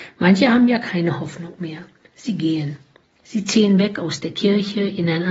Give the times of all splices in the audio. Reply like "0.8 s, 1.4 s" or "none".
none